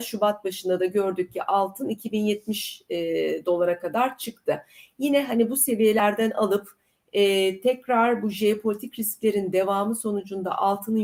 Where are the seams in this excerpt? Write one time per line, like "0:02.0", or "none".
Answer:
none